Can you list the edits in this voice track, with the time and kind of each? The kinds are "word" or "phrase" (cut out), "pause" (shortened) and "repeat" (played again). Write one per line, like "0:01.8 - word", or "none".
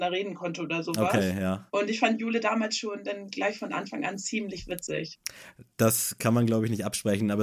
0:01.7 - pause